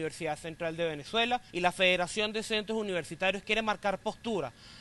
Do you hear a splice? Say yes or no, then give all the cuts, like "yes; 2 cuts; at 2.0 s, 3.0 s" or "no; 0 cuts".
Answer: yes; 1 cut; at 1.5 s